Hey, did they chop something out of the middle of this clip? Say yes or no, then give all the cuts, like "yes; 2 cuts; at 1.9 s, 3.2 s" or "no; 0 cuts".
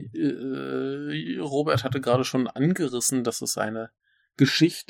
no; 0 cuts